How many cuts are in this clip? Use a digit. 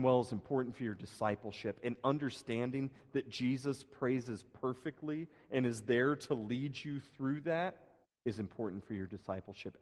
1